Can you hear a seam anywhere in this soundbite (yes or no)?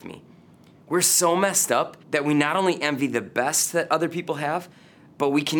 yes